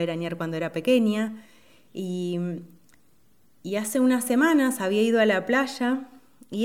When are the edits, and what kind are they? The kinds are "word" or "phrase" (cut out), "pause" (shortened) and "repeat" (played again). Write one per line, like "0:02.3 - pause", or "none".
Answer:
none